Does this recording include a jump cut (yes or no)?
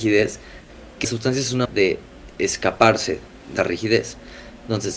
yes